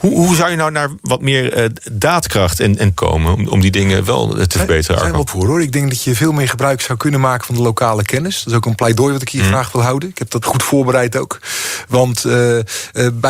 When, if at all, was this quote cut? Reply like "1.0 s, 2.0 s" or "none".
3.0 s, 5.3 s, 10.4 s